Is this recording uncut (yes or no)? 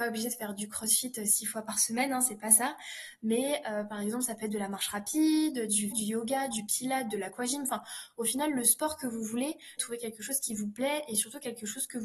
no